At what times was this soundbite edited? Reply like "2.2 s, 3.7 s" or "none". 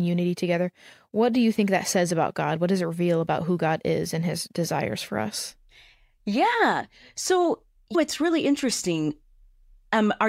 7.9 s